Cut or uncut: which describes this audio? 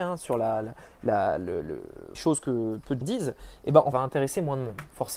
cut